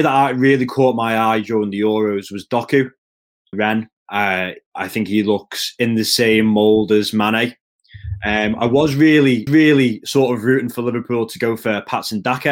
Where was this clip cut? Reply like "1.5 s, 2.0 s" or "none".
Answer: 3.5 s, 9.5 s